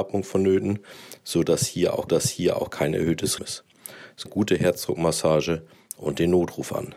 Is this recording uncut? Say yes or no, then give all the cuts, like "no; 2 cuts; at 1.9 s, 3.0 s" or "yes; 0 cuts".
no; 3 cuts; at 2.1 s, 3.4 s, 4.3 s